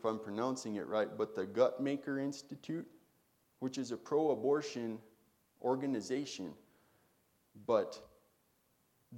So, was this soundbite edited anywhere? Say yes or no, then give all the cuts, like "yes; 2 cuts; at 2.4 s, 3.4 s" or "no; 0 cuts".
no; 0 cuts